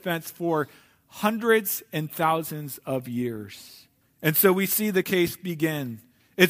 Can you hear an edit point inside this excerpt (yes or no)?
yes